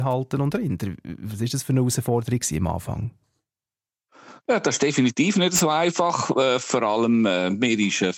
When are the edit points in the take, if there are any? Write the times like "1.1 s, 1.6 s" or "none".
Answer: none